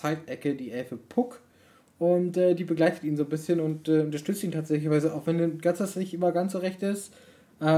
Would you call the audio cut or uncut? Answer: uncut